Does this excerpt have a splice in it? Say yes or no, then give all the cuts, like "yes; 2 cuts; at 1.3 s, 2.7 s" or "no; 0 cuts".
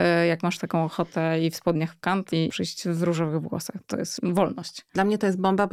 no; 0 cuts